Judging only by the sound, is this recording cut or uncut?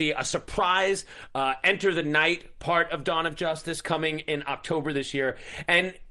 uncut